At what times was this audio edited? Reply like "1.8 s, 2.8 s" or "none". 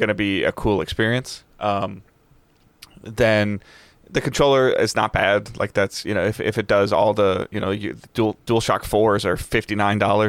none